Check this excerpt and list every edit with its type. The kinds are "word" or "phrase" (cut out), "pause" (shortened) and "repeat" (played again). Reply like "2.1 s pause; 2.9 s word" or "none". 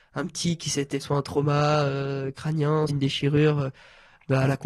1.0 s word; 2.9 s word